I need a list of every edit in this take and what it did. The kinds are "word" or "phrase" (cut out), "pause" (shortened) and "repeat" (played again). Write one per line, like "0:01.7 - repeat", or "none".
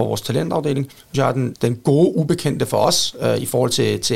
0:01.1 - phrase
0:01.5 - word